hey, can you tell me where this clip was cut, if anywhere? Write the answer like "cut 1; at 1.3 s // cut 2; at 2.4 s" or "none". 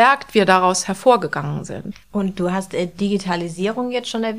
cut 1; at 2.0 s